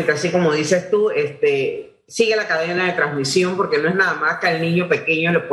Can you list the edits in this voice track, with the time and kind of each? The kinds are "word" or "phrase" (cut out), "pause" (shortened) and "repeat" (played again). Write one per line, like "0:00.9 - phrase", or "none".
none